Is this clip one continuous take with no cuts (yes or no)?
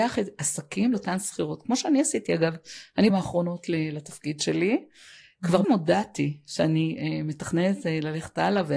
no